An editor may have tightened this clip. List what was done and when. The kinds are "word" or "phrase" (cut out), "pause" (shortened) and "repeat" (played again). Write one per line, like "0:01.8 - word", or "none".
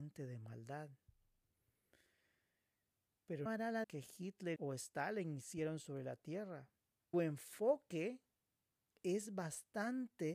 0:03.5 - word
0:03.8 - word
0:04.6 - word
0:07.1 - word